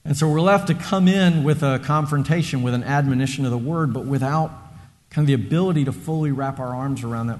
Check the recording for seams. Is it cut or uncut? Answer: uncut